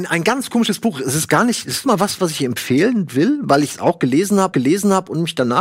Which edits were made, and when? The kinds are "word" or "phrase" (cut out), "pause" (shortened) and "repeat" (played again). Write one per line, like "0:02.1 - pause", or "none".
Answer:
0:01.8 - word
0:04.5 - repeat